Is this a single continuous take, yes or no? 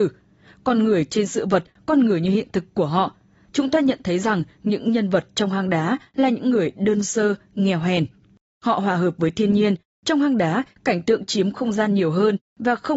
yes